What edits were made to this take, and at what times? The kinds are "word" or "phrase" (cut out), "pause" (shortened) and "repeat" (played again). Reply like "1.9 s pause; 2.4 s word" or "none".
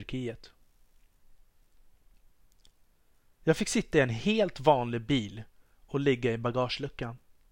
none